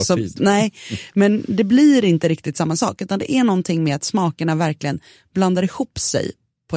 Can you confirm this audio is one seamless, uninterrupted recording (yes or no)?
yes